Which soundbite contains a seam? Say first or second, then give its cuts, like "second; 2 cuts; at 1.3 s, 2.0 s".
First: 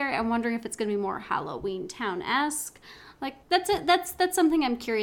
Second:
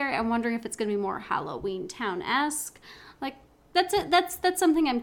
first; 1 cut; at 3.4 s